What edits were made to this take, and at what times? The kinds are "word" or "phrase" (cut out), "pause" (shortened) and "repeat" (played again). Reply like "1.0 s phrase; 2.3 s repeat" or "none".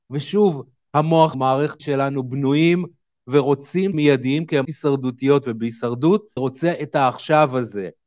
1.3 s word; 1.8 s word; 3.9 s word; 4.6 s word; 6.4 s word